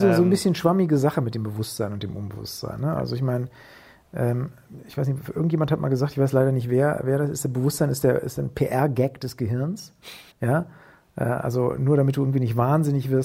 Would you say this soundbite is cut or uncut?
cut